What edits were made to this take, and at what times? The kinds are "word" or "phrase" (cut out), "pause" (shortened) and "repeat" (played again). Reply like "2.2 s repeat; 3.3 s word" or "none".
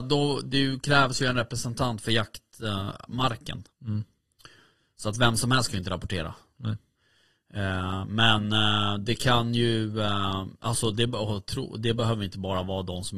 none